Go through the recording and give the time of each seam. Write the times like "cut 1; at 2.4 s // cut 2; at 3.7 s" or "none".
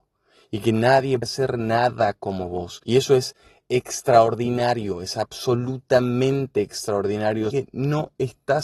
cut 1; at 1.2 s // cut 2; at 2.8 s // cut 3; at 7.5 s